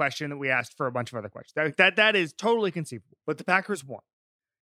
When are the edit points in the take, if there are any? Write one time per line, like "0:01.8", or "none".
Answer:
0:03.2